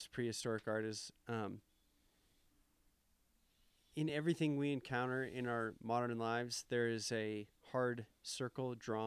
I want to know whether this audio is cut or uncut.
uncut